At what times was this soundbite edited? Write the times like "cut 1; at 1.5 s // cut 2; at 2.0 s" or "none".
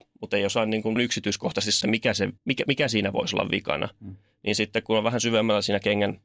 cut 1; at 1.0 s // cut 2; at 1.8 s // cut 3; at 2.4 s

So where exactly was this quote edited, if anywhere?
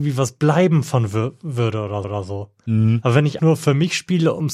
cut 1; at 2.0 s // cut 2; at 3.4 s

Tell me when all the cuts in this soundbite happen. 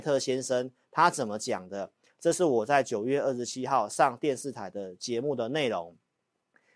none

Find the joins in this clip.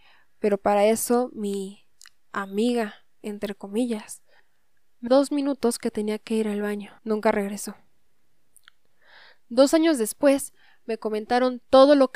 cut 1; at 5.1 s // cut 2; at 7.0 s

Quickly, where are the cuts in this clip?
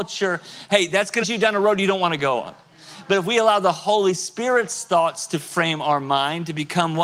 cut 1; at 1.2 s

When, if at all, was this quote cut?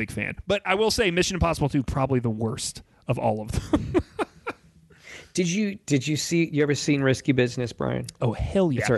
none

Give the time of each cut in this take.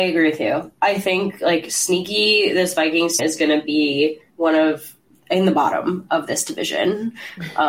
cut 1; at 3.2 s // cut 2; at 4.3 s // cut 3; at 5.1 s

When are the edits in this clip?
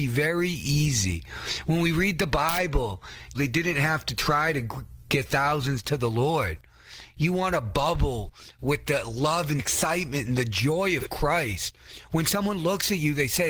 cut 1; at 3.3 s // cut 2; at 9.6 s

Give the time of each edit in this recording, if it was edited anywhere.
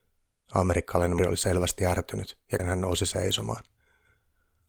cut 1; at 1.2 s // cut 2; at 2.6 s

